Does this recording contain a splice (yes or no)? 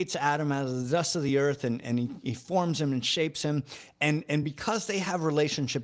no